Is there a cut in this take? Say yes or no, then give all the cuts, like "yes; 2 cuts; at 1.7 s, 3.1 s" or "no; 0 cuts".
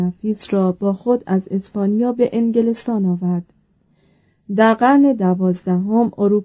no; 0 cuts